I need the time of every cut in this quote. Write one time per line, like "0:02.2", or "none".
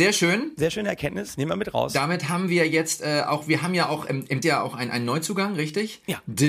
0:04.4